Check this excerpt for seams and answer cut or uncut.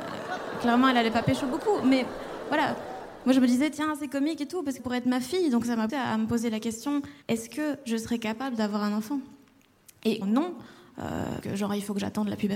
cut